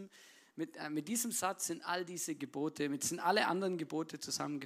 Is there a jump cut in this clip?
no; 0 cuts

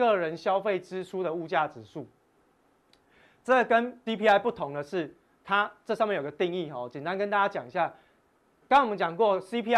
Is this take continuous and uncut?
no; 1 cut; at 4.1 s

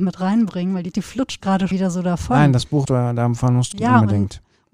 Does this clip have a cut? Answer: yes; 5 cuts; at 0.9 s, 1.4 s, 1.7 s, 2.9 s, 3.7 s

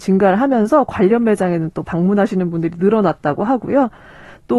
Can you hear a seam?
no; 0 cuts

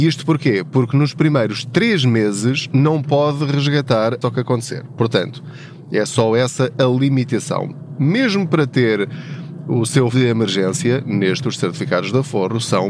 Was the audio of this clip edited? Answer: yes; 3 cuts; at 4.2 s, 10.1 s, 11.4 s

